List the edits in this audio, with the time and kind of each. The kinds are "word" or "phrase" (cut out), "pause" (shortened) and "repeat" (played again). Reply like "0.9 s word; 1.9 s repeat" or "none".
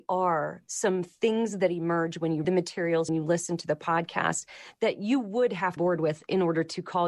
2.4 s word; 3.1 s phrase; 5.8 s phrase